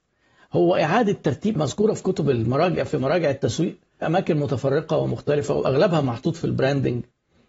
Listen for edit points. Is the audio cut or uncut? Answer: cut